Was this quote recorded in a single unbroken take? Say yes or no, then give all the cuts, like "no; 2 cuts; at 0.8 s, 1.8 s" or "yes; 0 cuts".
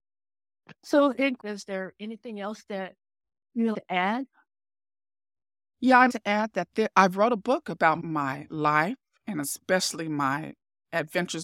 no; 3 cuts; at 1.4 s, 3.7 s, 6.1 s